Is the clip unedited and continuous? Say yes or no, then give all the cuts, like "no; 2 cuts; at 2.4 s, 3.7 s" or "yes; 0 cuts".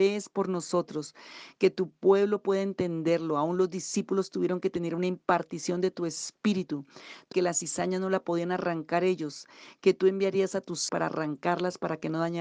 no; 2 cuts; at 7.3 s, 10.9 s